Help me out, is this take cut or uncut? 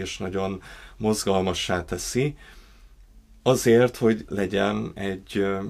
cut